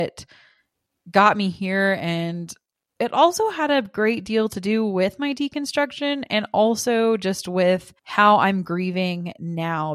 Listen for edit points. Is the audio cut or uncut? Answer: cut